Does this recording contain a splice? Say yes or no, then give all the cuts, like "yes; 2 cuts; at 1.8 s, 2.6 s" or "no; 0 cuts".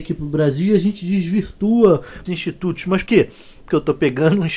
yes; 2 cuts; at 2.3 s, 3.1 s